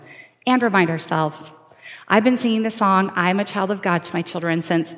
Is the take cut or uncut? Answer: uncut